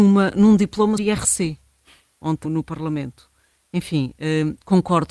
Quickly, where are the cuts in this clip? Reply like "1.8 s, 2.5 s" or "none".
1.0 s, 2.4 s